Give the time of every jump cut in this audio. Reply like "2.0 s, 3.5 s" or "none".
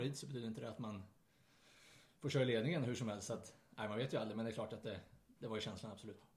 none

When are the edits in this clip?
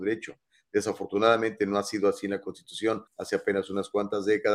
3.1 s

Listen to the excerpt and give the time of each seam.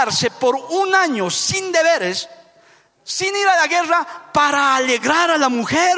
none

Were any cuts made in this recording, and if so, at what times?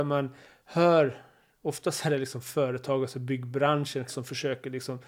4.1 s

